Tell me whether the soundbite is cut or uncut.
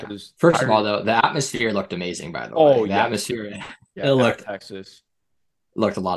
uncut